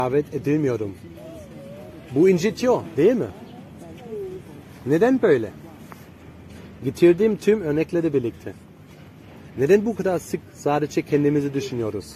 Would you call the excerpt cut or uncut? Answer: uncut